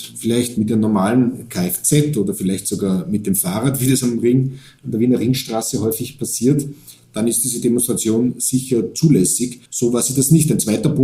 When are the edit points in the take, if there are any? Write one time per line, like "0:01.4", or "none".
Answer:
0:09.7